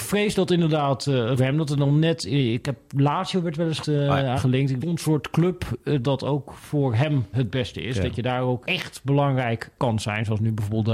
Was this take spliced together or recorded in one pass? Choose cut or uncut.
cut